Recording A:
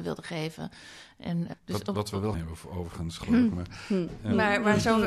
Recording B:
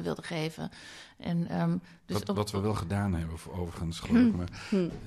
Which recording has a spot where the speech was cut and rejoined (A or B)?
A